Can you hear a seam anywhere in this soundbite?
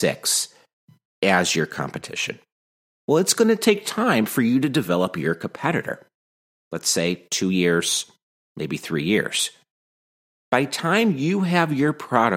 no; 0 cuts

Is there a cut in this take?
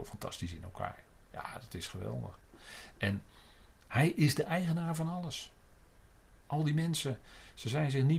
no; 0 cuts

